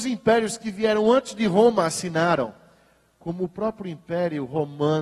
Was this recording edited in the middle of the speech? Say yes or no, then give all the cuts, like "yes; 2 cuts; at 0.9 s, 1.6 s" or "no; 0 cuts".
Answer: no; 0 cuts